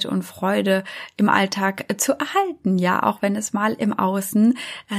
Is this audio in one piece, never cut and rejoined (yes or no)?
yes